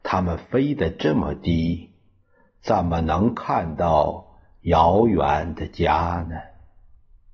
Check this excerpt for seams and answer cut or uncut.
uncut